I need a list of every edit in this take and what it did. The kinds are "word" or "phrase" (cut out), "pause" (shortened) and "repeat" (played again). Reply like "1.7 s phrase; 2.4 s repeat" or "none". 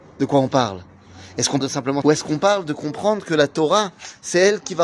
1.6 s word; 2.0 s word